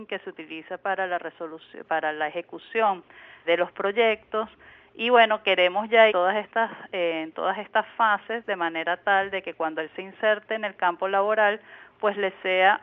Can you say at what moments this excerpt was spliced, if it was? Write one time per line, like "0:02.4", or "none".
0:03.4
0:06.1